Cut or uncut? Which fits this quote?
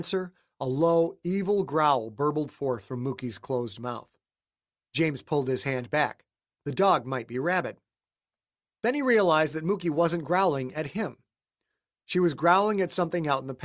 uncut